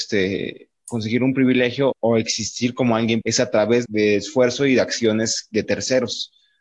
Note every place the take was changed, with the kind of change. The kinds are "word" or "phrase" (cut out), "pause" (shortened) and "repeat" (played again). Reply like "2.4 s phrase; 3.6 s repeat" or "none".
1.9 s word; 3.2 s word; 3.9 s word